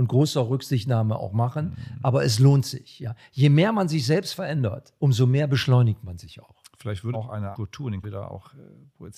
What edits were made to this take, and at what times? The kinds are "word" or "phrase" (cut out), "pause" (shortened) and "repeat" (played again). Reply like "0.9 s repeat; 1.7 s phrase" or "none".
5.0 s word; 7.1 s word; 7.5 s word; 8.0 s word